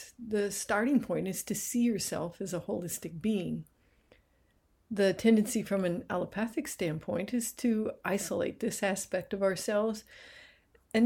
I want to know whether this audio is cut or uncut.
uncut